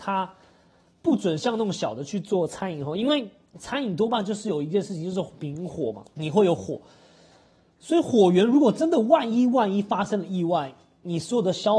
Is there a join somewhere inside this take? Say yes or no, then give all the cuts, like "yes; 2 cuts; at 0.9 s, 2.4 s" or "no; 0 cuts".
yes; 1 cut; at 6.1 s